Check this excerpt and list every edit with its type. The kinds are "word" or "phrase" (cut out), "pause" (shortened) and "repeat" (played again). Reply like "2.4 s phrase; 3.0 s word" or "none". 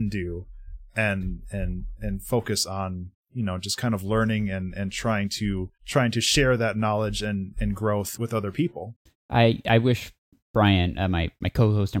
5.8 s pause; 8.2 s word